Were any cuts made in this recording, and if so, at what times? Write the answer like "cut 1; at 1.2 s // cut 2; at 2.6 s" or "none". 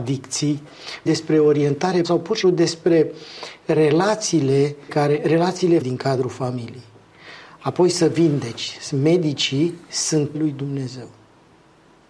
cut 1; at 1.1 s // cut 2; at 2.0 s // cut 3; at 2.4 s // cut 4; at 4.9 s // cut 5; at 5.8 s // cut 6; at 8.9 s // cut 7; at 10.3 s